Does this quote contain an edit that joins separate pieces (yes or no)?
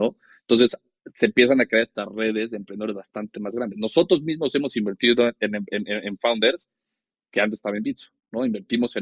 no